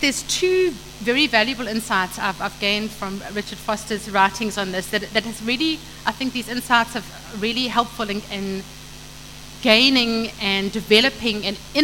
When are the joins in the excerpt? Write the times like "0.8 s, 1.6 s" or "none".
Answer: none

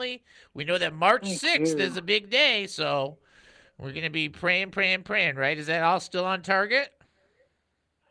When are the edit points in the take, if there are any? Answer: none

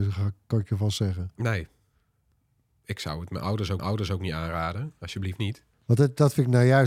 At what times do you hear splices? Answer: 3.8 s, 5.7 s

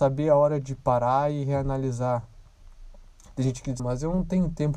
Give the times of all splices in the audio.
3.8 s

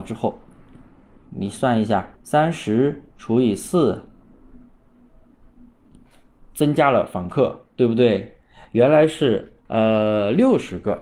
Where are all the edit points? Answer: 2.1 s, 3.1 s, 7.7 s, 9.6 s

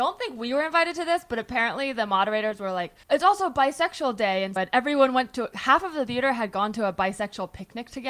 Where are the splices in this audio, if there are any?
3.0 s, 4.6 s, 5.5 s

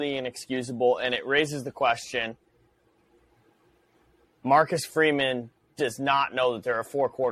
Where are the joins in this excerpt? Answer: none

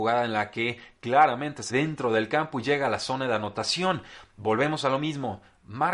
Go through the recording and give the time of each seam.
1.7 s

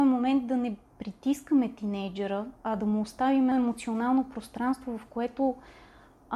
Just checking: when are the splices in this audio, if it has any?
2.6 s, 3.5 s

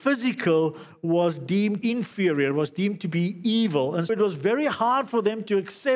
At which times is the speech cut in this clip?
1.8 s, 4.1 s

